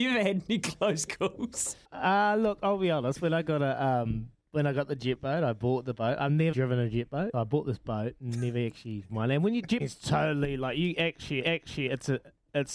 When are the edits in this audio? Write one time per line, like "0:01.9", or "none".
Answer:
0:01.8
0:06.5
0:07.3
0:09.1
0:09.8
0:11.4